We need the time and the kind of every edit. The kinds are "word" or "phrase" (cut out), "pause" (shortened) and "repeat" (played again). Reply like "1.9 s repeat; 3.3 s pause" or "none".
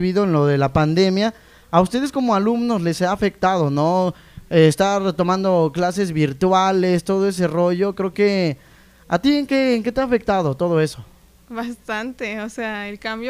none